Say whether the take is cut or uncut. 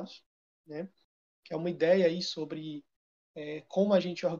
uncut